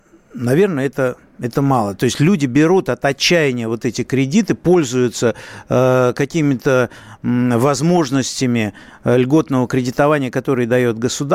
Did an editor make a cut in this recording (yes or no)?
no